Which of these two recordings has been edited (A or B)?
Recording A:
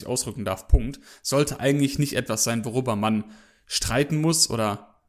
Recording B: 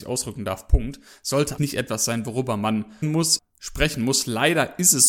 B